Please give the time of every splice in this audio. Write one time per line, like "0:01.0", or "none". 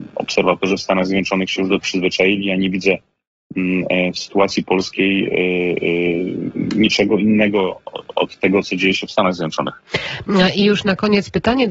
0:01.8
0:08.6